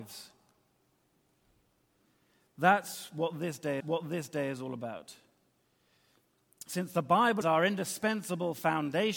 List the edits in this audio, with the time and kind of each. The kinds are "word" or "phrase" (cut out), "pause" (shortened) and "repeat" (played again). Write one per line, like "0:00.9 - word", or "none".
0:03.8 - repeat
0:07.4 - word